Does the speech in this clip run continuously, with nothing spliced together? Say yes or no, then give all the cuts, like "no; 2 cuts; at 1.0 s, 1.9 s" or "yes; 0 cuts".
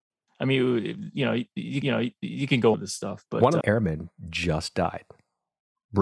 no; 3 cuts; at 1.8 s, 2.7 s, 3.6 s